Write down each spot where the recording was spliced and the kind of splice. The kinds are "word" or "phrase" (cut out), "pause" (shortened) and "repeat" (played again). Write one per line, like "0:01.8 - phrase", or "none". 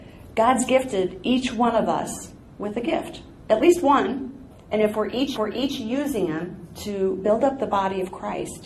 0:04.5 - pause
0:05.4 - repeat